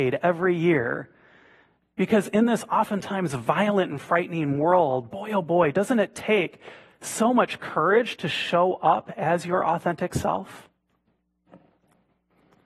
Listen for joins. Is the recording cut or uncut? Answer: uncut